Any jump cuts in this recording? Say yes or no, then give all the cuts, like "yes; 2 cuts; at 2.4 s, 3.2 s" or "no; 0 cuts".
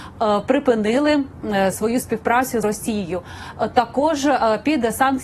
yes; 2 cuts; at 1.7 s, 2.6 s